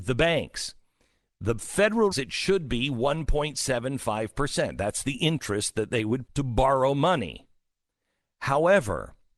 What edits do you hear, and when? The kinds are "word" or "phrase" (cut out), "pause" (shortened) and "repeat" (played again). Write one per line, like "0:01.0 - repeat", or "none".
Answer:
0:02.1 - phrase
0:06.3 - word

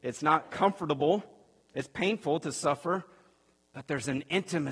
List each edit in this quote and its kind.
none

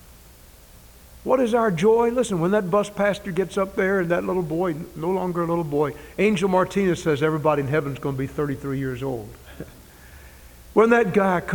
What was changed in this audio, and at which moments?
none

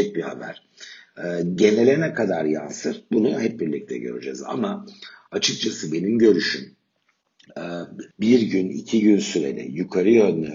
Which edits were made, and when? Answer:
0:08.1 - pause

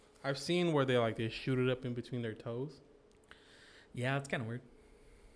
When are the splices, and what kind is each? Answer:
none

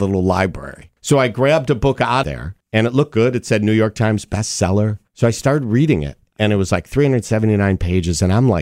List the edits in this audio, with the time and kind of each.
0:01.0 - pause
0:02.2 - word
0:02.6 - pause
0:05.1 - pause

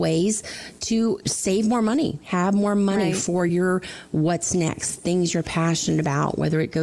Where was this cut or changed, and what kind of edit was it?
none

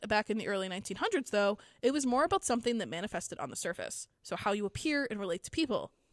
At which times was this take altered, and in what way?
none

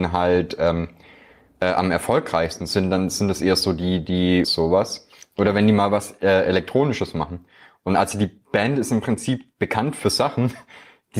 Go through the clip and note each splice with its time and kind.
0:04.4 - phrase

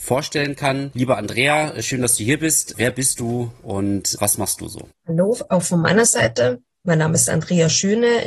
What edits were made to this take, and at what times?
0:04.9 - pause

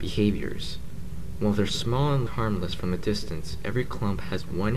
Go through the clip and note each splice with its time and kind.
0:02.3 - word

